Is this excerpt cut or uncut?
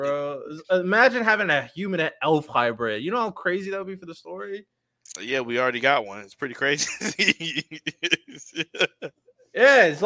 uncut